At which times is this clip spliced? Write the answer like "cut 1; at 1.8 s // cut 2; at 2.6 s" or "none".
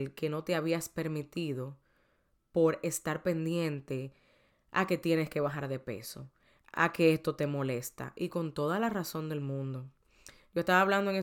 none